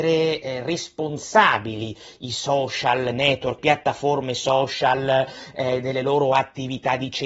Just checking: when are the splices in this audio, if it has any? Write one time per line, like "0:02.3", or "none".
0:03.6